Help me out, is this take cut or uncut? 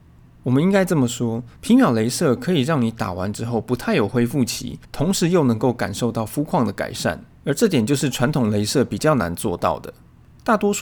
cut